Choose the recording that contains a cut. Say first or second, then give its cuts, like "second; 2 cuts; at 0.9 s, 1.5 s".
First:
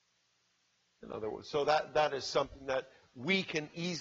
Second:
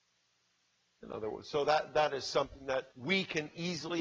second; 1 cut; at 2.9 s